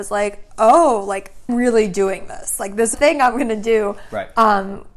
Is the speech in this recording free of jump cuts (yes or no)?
no